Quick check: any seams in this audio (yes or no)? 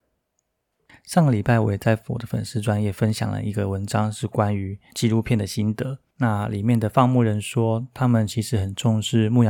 no